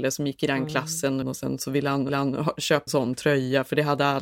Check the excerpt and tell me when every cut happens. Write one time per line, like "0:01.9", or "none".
0:01.2
0:02.1
0:02.9